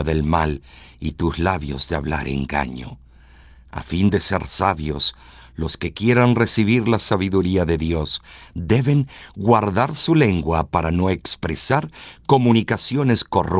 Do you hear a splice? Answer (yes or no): no